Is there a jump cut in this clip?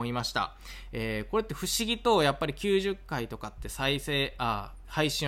no; 0 cuts

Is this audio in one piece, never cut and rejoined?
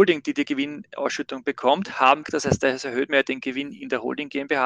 no; 1 cut; at 2.2 s

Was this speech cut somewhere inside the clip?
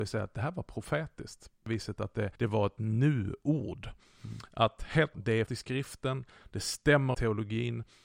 yes; 5 cuts; at 1.7 s, 2.4 s, 5.1 s, 5.5 s, 7.1 s

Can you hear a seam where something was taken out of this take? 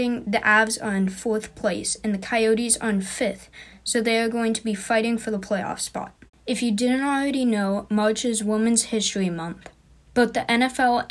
yes; 1 cut; at 6.3 s

